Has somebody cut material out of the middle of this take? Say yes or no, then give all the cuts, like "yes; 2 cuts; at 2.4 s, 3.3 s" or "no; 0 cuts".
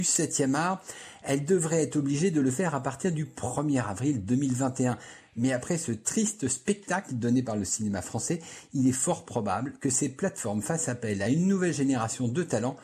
no; 0 cuts